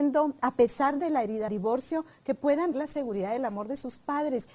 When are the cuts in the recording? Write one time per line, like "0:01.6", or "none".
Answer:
0:01.5
0:02.7